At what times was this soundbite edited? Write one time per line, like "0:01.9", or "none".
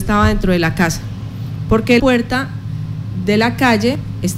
0:02.0

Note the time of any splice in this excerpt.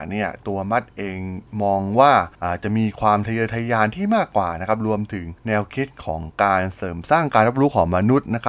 0:02.3

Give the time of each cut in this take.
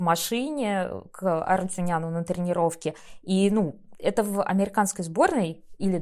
none

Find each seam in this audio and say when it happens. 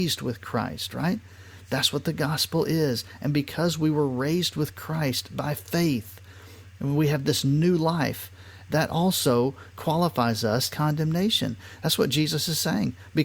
0:08.7
0:10.7

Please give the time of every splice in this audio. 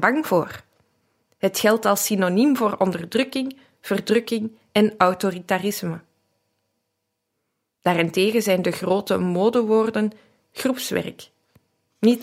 none

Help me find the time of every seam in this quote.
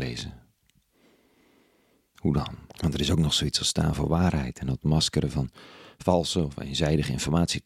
0:02.7

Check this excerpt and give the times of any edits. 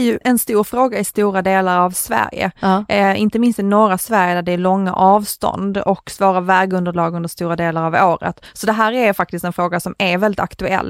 none

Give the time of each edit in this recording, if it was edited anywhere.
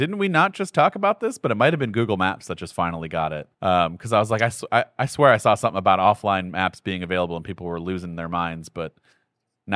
0:03.5

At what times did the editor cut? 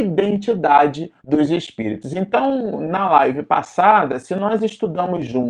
0:01.2

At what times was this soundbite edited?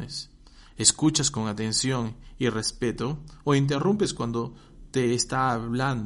none

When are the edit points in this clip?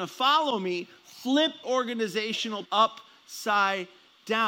0:01.6
0:02.6

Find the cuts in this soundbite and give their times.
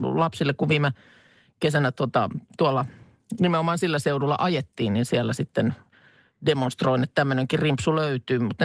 none

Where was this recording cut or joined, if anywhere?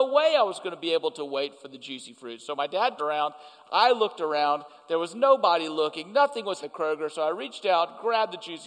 0:03.0
0:06.6

